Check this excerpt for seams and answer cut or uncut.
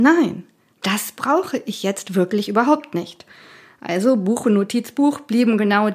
uncut